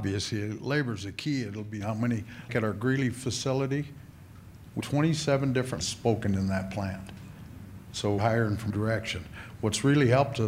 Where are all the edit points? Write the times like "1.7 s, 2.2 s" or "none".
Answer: 1.8 s, 2.5 s, 4.8 s, 5.8 s, 8.2 s, 8.7 s